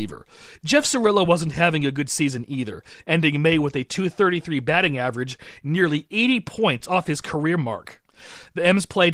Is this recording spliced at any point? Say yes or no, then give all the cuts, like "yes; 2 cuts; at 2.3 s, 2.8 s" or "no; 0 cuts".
no; 0 cuts